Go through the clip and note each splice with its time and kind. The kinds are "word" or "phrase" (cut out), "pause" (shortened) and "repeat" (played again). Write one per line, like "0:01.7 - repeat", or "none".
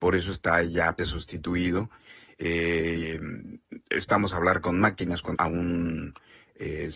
0:01.0 - word
0:04.3 - word
0:05.4 - word